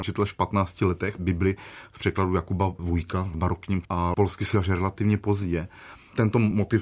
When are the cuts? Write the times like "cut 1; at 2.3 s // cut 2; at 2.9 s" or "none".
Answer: cut 1; at 1.2 s // cut 2; at 3.8 s // cut 3; at 4.5 s